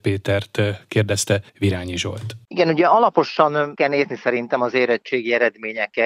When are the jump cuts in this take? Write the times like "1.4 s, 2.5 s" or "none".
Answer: 1.5 s, 2.4 s, 3.8 s

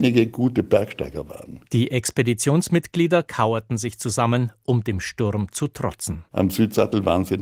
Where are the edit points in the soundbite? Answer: 1.7 s, 6.3 s

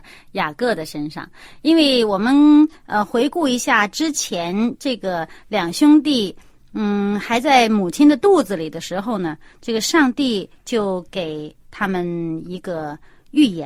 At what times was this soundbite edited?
none

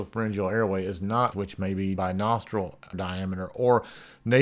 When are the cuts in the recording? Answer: 1.3 s, 2.0 s, 2.9 s

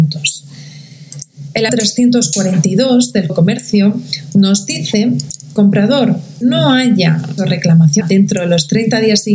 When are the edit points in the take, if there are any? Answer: 1.7 s, 3.3 s, 5.6 s, 6.4 s, 7.4 s, 8.0 s

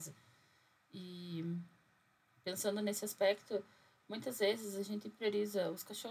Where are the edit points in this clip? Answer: none

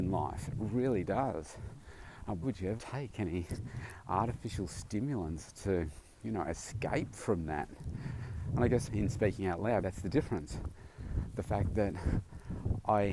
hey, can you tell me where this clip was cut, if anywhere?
2.4 s, 2.8 s, 8.9 s, 9.8 s

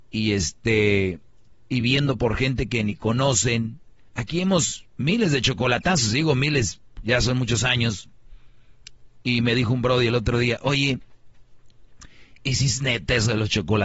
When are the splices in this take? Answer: 1.5 s, 4.9 s

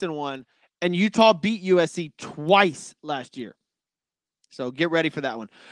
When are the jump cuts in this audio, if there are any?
none

